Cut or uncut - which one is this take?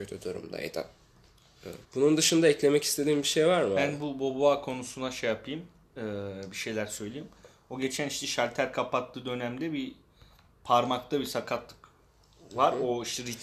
cut